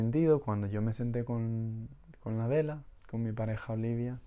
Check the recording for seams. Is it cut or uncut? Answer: uncut